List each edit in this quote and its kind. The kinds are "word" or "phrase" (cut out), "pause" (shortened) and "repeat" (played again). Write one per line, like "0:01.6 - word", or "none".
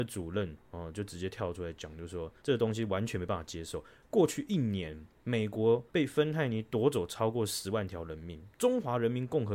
0:02.4 - pause
0:05.9 - pause